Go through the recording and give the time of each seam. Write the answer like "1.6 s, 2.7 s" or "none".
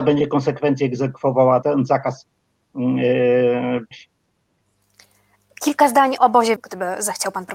1.6 s, 3.9 s, 6.2 s, 6.6 s